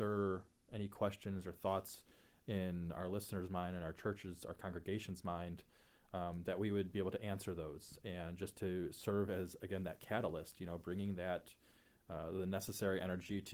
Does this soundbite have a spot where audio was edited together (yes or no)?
no